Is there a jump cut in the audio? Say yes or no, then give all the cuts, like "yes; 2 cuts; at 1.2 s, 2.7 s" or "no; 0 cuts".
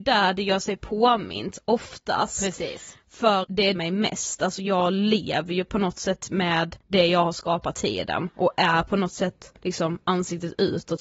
yes; 5 cuts; at 3.4 s, 3.8 s, 6.8 s, 7.7 s, 9.6 s